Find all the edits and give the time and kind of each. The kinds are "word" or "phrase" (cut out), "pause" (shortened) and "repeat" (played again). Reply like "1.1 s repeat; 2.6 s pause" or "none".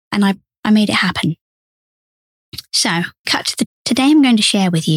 3.2 s word; 3.7 s word